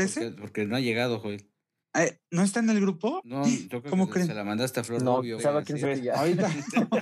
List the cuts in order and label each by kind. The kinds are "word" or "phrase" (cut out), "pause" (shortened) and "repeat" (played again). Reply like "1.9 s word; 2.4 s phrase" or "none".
2.2 s pause; 5.4 s word; 5.8 s phrase